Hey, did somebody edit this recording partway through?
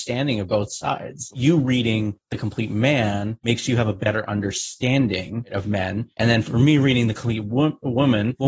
no; 0 cuts

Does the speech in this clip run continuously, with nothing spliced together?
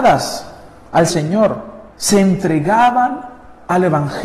no; 2 cuts; at 1.1 s, 1.9 s

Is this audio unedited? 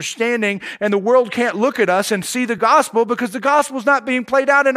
yes; 0 cuts

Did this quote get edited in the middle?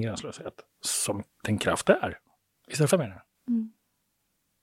yes; 2 cuts; at 2.9 s, 3.3 s

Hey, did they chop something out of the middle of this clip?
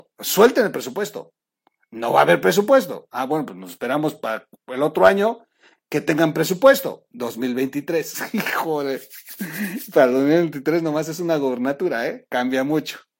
no; 0 cuts

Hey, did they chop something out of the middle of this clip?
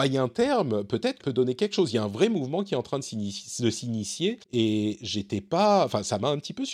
yes; 2 cuts; at 1.2 s, 4.4 s

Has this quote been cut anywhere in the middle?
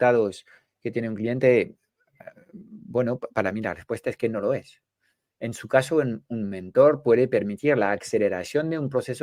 no; 0 cuts

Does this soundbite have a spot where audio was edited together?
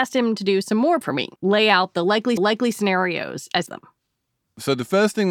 yes; 4 cuts; at 1.0 s, 1.4 s, 2.4 s, 3.7 s

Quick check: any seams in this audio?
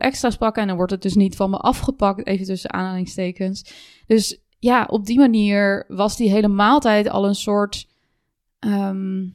no; 0 cuts

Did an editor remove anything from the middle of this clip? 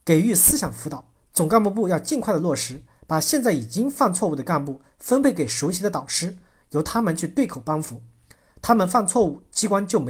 no; 0 cuts

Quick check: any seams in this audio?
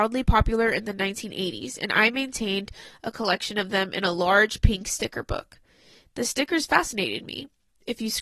no; 0 cuts

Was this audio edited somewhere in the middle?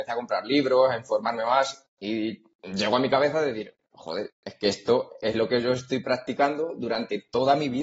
no; 0 cuts

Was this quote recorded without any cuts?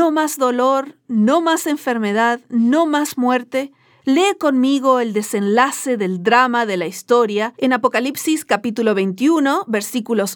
yes; 0 cuts

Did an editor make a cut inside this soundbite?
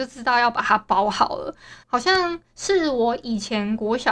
yes; 1 cut; at 1.8 s

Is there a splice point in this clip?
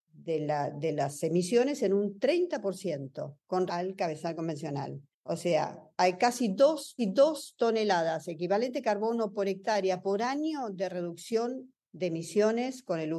yes; 3 cuts; at 3.7 s, 5.1 s, 7.0 s

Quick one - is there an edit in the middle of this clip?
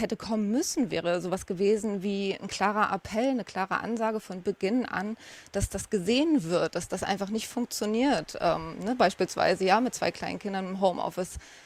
no; 0 cuts

